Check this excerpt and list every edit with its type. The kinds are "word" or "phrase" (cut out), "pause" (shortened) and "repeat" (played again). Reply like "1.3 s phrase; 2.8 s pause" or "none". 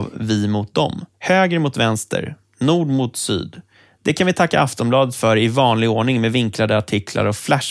1.1 s pause